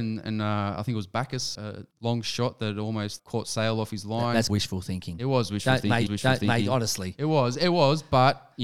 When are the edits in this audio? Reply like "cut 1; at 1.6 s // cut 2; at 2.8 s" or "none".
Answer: cut 1; at 1.5 s // cut 2; at 1.9 s // cut 3; at 3.2 s // cut 4; at 4.5 s // cut 5; at 6.1 s